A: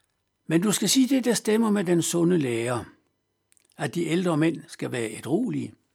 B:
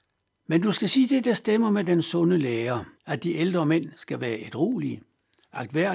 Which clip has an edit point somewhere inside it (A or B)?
B